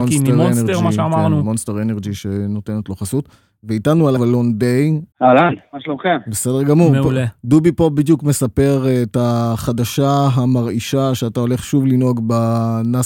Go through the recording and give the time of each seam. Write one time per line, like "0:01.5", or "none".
0:04.2
0:05.1